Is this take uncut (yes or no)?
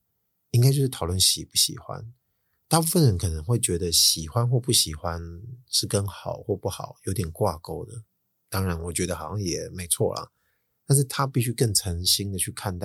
yes